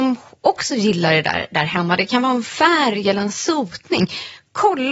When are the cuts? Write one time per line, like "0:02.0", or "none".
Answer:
none